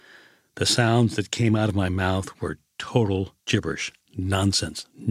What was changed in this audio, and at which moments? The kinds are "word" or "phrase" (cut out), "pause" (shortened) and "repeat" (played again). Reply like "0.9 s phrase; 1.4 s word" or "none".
3.4 s pause

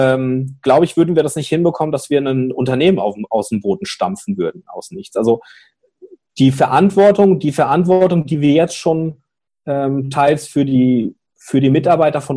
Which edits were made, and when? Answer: none

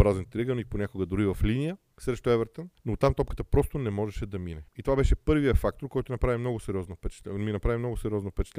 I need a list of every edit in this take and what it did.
1.9 s pause; 2.8 s pause; 4.7 s pause

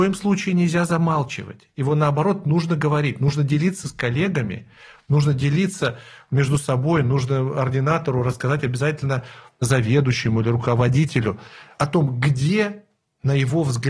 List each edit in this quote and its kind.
none

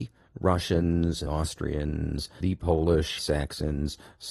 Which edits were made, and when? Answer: 1.3 s word; 2.4 s word; 3.2 s word

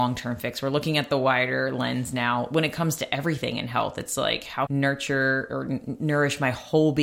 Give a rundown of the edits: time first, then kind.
4.7 s phrase

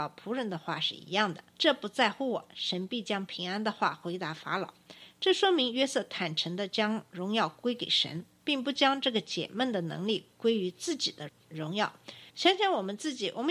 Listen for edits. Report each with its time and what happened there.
1.5 s pause; 12.3 s pause

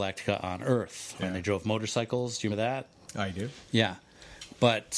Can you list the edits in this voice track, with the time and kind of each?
2.5 s word

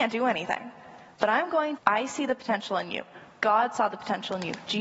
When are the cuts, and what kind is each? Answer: 1.8 s phrase

